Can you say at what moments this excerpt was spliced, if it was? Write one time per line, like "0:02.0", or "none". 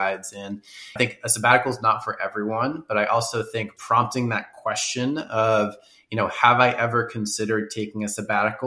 0:01.0
0:03.8